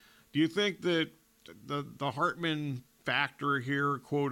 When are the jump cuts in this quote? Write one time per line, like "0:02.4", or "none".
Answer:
none